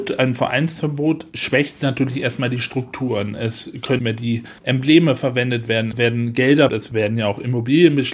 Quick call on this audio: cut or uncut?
cut